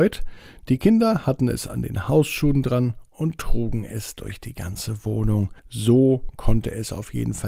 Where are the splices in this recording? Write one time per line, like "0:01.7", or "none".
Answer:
0:05.6